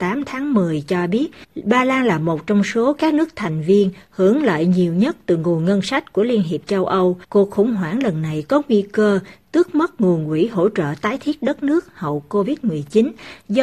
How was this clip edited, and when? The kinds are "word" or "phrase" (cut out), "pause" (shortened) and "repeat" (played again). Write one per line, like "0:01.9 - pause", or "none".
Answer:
0:07.2 - pause